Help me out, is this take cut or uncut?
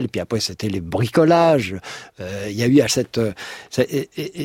cut